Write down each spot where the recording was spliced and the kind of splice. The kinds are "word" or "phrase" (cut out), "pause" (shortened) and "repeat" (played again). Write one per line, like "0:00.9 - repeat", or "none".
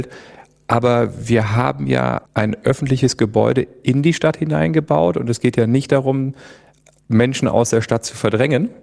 0:02.3 - pause